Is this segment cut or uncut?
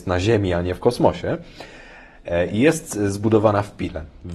uncut